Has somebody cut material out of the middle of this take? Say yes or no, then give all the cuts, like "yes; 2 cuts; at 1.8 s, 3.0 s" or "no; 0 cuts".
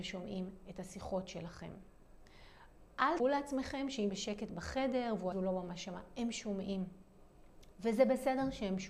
yes; 3 cuts; at 3.2 s, 4.1 s, 5.3 s